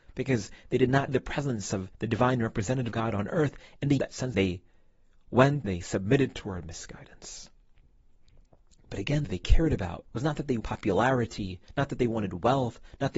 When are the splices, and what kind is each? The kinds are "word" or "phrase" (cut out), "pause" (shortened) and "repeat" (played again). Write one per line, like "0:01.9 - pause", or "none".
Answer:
0:01.1 - word
0:01.9 - pause
0:02.9 - word
0:04.0 - phrase
0:04.3 - phrase
0:05.6 - word
0:09.2 - phrase
0:10.1 - pause
0:10.6 - word

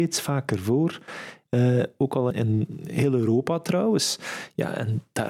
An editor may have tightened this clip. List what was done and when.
0:02.3 - word

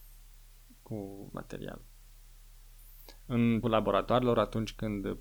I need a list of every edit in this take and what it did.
0:01.3 - word
0:03.6 - word

